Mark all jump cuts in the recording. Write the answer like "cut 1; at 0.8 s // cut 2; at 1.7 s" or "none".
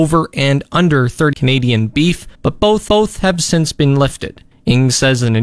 cut 1; at 1.3 s // cut 2; at 2.3 s // cut 3; at 2.9 s // cut 4; at 4.5 s